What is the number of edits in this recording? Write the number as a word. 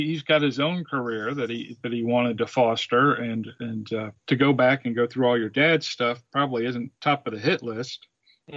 two